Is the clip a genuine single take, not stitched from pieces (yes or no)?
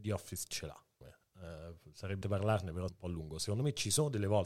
no